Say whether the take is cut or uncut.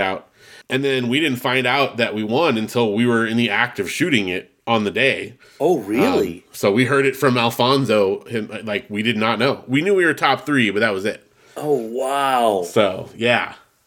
uncut